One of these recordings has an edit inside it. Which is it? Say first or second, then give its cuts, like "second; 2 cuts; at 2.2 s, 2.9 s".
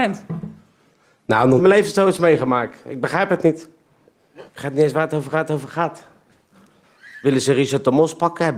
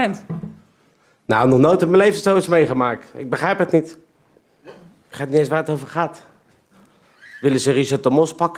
first; 3 cuts; at 1.6 s, 4.5 s, 5.3 s